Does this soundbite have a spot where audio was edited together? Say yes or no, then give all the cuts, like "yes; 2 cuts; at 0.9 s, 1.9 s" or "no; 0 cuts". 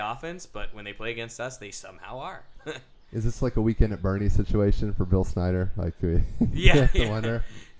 no; 0 cuts